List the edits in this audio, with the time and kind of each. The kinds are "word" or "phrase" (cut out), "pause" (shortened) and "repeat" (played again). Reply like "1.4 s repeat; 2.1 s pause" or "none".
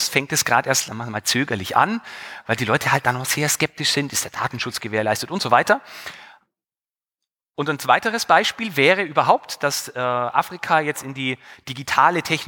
none